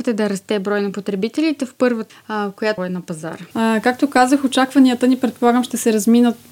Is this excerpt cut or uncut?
cut